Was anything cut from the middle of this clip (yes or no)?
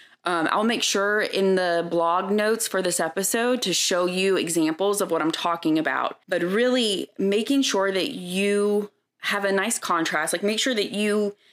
yes